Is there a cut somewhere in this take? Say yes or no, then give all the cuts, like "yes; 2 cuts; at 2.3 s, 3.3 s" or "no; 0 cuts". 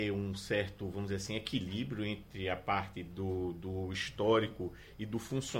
no; 0 cuts